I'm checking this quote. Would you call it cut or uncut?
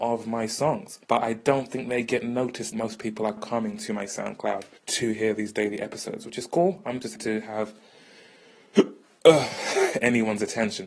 cut